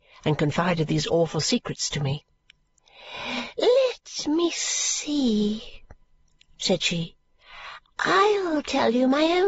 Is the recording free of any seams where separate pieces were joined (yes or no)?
yes